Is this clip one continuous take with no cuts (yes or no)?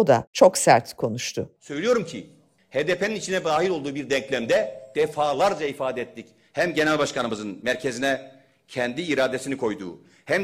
yes